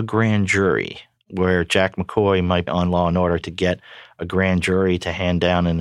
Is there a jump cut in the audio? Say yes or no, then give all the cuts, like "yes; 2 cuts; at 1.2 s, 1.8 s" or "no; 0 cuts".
yes; 2 cuts; at 2.7 s, 3.4 s